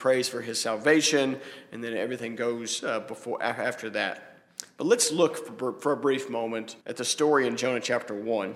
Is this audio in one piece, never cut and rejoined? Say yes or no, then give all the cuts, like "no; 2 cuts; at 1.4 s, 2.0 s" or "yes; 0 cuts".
no; 1 cut; at 6.8 s